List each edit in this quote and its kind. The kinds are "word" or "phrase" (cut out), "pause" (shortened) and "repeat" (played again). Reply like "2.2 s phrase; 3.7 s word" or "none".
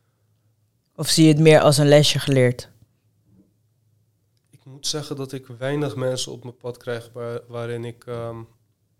none